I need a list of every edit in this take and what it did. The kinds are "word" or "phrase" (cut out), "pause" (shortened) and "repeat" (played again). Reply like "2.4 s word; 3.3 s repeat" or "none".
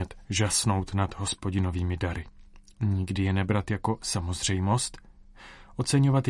none